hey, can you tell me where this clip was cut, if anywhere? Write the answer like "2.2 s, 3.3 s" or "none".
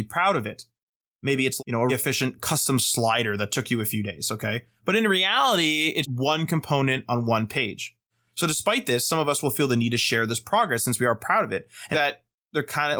1.6 s, 1.9 s, 6.0 s, 11.9 s